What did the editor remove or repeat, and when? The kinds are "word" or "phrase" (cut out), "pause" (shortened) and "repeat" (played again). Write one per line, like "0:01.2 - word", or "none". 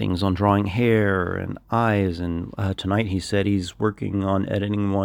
none